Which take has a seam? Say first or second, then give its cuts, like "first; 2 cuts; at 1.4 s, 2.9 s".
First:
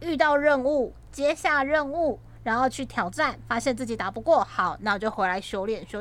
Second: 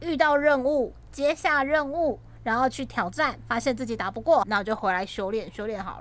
second; 1 cut; at 4.4 s